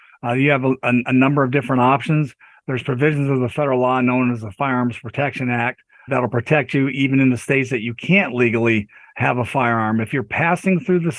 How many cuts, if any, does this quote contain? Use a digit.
1